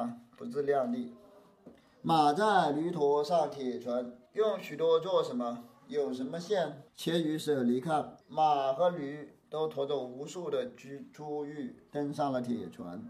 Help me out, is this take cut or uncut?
cut